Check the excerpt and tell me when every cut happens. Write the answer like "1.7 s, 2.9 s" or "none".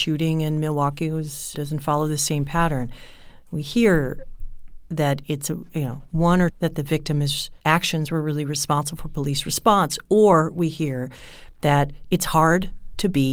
1.5 s, 6.5 s, 7.6 s